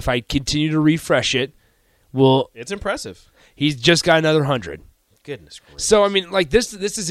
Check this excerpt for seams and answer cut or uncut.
uncut